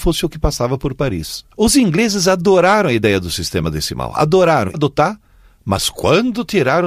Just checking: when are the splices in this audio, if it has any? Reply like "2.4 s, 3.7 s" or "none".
1.5 s, 4.7 s